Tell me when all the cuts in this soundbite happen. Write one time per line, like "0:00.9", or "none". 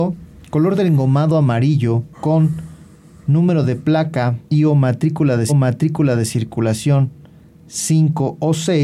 0:02.1
0:04.4
0:05.5